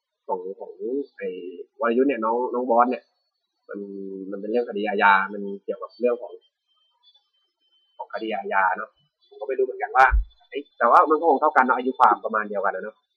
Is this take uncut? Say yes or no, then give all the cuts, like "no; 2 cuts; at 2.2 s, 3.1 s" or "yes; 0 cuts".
no; 2 cuts; at 1.7 s, 10.7 s